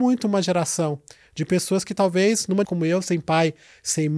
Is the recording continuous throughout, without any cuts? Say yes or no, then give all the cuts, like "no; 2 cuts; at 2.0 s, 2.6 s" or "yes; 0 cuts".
no; 1 cut; at 2.6 s